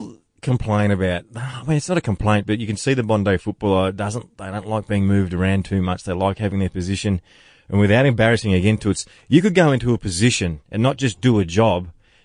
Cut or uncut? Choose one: uncut